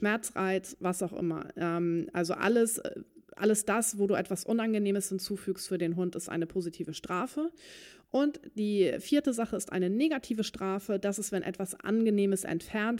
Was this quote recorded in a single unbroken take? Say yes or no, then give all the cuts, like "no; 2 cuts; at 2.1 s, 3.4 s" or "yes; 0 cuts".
yes; 0 cuts